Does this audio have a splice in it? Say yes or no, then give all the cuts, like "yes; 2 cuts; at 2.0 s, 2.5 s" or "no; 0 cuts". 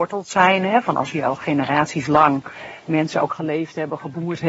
no; 0 cuts